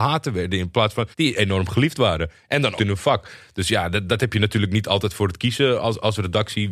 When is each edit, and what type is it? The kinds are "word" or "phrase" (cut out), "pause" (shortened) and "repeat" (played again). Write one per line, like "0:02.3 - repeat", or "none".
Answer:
0:01.1 - pause
0:02.8 - phrase